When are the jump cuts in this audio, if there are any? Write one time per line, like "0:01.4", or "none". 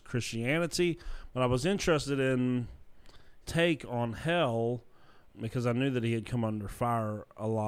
0:03.4
0:05.3